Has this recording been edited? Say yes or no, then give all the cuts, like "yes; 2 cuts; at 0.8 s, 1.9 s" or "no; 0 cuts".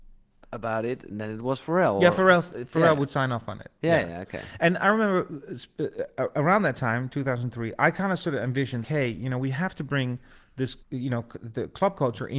yes; 3 cuts; at 1.1 s, 8.8 s, 10.8 s